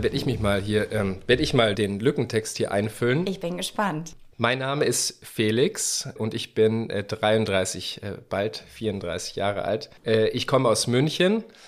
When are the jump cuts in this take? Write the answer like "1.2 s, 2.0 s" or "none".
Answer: 1.7 s, 4.3 s, 6.2 s, 10.0 s